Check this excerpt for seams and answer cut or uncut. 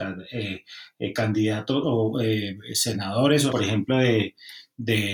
cut